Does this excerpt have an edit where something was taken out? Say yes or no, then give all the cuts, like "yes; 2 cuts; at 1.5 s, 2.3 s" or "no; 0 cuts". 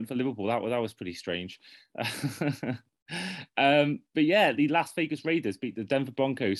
no; 0 cuts